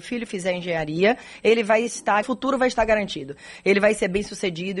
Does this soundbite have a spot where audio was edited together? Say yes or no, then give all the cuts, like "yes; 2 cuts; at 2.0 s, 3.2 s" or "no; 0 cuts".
yes; 1 cut; at 2.2 s